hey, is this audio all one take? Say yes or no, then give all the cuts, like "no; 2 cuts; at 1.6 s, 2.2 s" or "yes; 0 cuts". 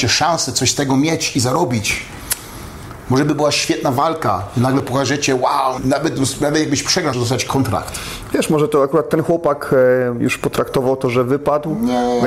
no; 2 cuts; at 5.8 s, 7.1 s